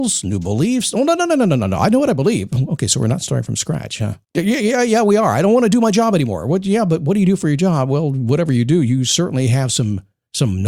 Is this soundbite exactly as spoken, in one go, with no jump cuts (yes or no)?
no